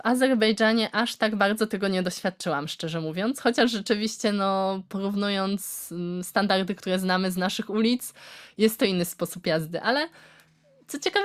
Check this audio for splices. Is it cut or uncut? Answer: uncut